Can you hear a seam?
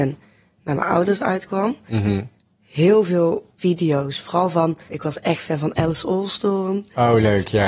yes; 2 cuts; at 3.6 s, 4.9 s

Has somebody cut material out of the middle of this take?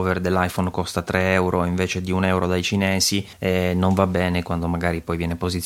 yes; 1 cut; at 3.3 s

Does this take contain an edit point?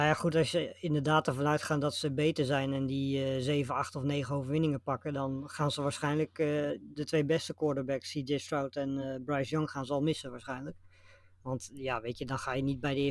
no; 0 cuts

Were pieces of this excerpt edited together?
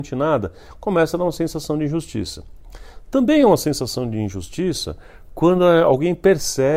no; 0 cuts

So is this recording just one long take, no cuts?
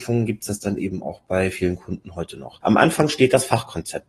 yes; 0 cuts

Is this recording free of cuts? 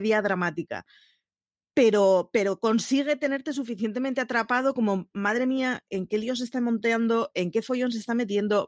yes; 0 cuts

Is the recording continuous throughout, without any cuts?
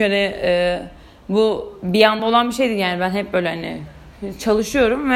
yes; 0 cuts

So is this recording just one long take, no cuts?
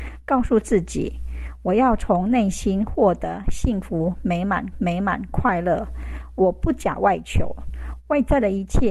no; 1 cut; at 4.7 s

